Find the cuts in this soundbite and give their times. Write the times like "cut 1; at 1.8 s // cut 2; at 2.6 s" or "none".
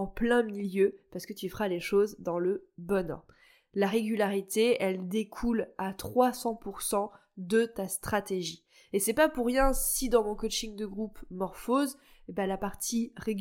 none